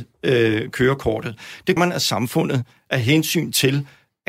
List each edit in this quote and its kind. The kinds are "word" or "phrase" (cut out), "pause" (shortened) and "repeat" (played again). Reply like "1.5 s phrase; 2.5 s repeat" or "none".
1.8 s word